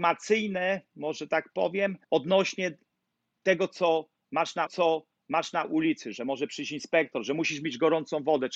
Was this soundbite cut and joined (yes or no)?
yes